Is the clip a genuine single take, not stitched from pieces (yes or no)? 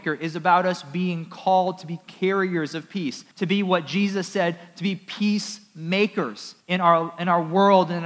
no